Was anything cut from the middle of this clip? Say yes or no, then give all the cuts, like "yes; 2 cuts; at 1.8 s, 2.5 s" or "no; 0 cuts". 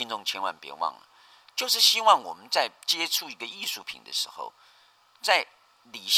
no; 0 cuts